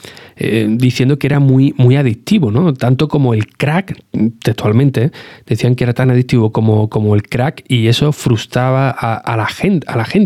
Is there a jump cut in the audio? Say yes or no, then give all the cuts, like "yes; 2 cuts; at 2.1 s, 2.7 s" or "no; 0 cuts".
no; 0 cuts